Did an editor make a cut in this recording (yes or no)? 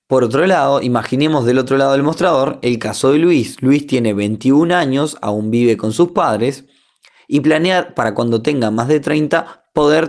no